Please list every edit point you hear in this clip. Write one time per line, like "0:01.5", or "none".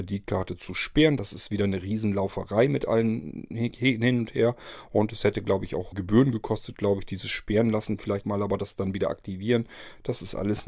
0:05.9
0:08.2